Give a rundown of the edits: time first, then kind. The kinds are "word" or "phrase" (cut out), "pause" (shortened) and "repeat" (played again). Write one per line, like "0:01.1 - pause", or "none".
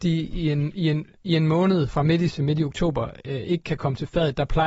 0:01.9 - word
0:02.3 - word